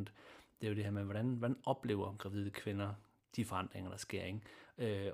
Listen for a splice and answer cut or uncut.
uncut